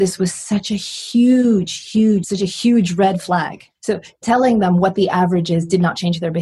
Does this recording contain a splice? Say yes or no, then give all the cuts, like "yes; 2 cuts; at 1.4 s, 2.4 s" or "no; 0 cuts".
yes; 2 cuts; at 2.2 s, 3.7 s